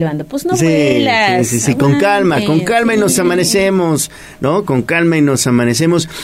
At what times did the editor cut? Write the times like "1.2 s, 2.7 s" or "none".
none